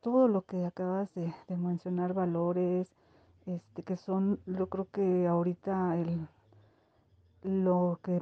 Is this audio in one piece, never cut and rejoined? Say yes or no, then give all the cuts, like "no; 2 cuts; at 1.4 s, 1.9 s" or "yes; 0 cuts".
yes; 0 cuts